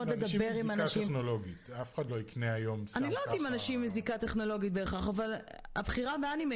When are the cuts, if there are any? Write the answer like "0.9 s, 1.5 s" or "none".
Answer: none